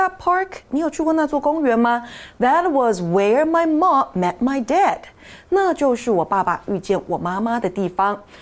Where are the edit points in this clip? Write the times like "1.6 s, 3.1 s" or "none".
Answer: none